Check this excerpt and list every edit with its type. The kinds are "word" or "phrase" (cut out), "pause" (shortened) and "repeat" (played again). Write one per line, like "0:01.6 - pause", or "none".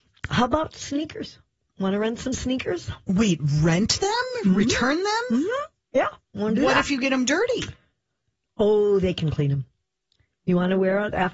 none

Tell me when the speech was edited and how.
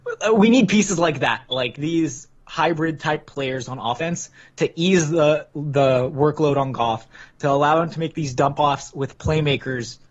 none

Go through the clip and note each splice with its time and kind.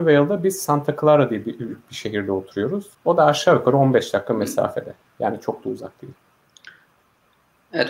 0:02.9 - pause

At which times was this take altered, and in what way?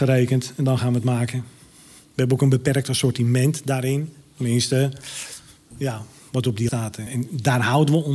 0:02.1 - pause
0:05.7 - word
0:06.7 - word
0:07.1 - word

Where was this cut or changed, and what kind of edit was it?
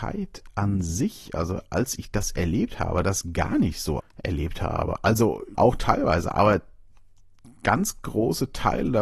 0:04.0 - phrase
0:05.5 - word

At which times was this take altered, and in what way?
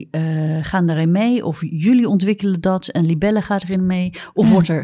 none

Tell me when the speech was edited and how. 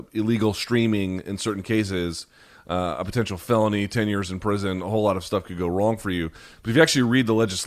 none

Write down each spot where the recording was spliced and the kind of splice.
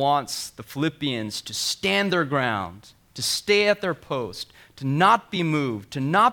none

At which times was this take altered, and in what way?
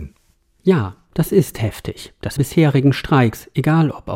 0:02.4 - phrase

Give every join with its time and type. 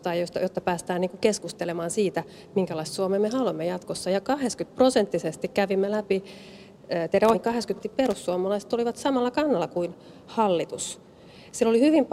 0:07.3 - word
0:07.8 - word

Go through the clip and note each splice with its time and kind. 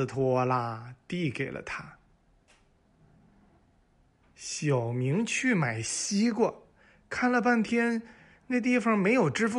none

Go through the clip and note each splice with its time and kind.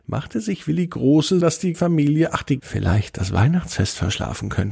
0:01.4 - word
0:01.7 - word
0:02.6 - phrase

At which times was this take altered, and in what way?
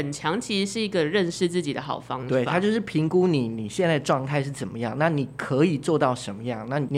none

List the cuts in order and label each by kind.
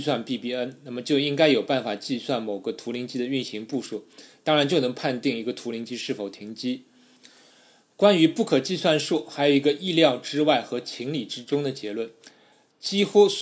none

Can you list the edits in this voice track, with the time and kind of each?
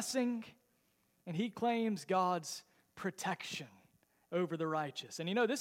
none

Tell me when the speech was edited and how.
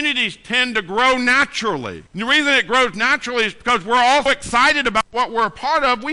0:02.1 - pause
0:04.3 - word

